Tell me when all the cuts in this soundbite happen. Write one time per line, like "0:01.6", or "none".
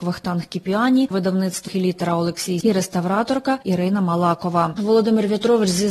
0:01.1
0:01.7
0:02.6